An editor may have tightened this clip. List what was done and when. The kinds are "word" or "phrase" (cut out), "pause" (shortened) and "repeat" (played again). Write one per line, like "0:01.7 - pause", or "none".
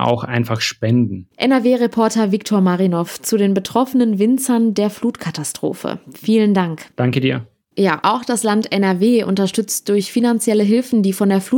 0:06.9 - pause
0:08.0 - word

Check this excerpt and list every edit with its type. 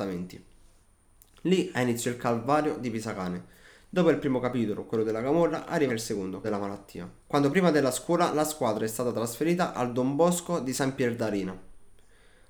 0:05.9 - word
0:06.4 - word
0:07.2 - pause

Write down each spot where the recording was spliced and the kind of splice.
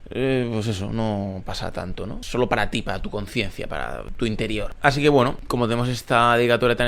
none

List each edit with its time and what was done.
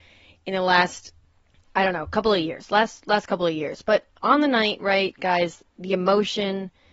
none

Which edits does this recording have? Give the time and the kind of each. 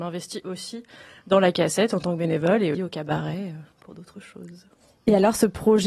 0:02.7 - word
0:03.7 - pause

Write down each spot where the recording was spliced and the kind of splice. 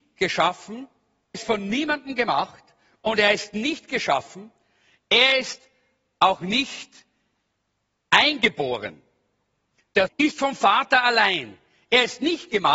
0:01.3 - word
0:10.1 - word

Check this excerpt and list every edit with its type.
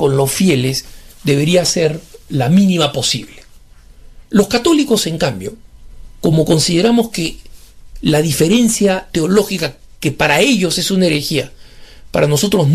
0:04.2 - pause

